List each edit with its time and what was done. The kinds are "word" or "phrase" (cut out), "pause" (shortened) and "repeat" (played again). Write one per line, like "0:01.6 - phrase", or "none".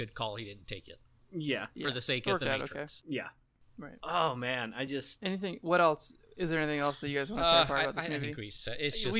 none